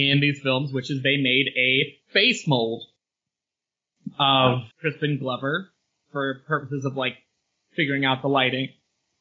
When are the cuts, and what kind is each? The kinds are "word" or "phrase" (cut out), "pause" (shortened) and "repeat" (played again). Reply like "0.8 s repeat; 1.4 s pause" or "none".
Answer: 2.0 s pause; 4.7 s pause